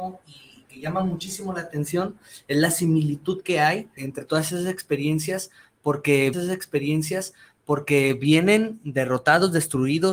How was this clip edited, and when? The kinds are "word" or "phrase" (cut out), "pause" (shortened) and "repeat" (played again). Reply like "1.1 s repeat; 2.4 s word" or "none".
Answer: 4.0 s word; 6.3 s repeat